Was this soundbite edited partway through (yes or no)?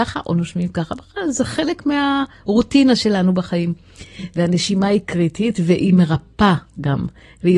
no